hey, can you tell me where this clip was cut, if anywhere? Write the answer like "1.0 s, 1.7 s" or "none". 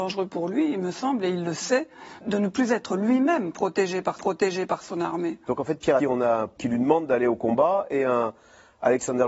2.2 s, 4.2 s, 6.0 s, 6.6 s